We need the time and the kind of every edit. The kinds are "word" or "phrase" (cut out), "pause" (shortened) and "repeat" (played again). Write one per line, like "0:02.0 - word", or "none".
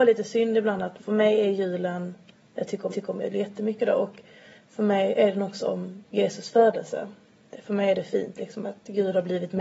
0:01.0 - word
0:02.9 - repeat